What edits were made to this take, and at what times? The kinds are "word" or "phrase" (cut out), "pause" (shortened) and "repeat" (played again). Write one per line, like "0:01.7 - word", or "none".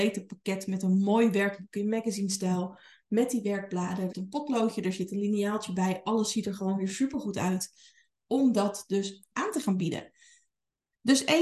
0:04.1 - word